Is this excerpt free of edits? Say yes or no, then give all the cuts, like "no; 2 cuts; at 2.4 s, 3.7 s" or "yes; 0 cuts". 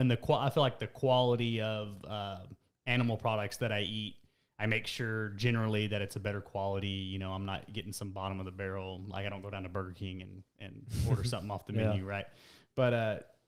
yes; 0 cuts